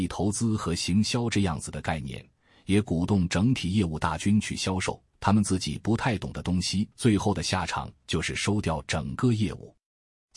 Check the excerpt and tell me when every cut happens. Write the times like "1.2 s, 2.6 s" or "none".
5.1 s, 6.9 s